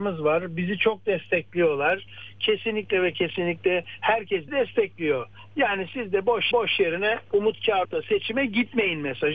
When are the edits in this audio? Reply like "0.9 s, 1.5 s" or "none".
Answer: 4.5 s, 6.5 s, 7.8 s